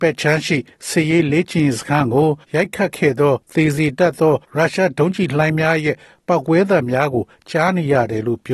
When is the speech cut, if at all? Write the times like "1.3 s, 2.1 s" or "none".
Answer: 2.4 s, 3.4 s, 4.4 s